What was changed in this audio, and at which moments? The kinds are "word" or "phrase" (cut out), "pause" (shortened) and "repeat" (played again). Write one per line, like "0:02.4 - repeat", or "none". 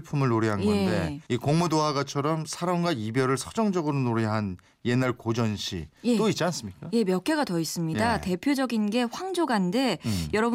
0:01.3 - pause

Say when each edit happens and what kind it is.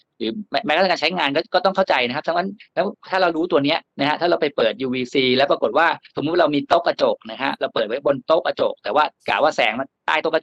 0:03.9 - pause
0:09.2 - pause

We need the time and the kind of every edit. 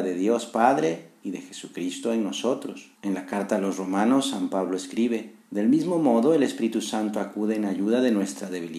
0:02.9 - pause
0:05.4 - pause

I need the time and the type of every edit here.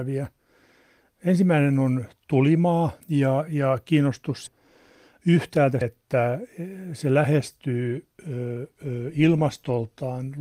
0:03.0 - pause
0:04.5 - phrase
0:05.8 - word

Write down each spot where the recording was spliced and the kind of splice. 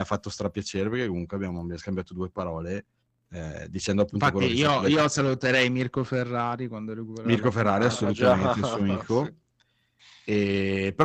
none

